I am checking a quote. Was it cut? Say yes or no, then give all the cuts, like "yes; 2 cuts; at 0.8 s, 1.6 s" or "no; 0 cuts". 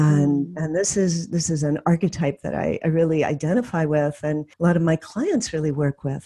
yes; 1 cut; at 4.5 s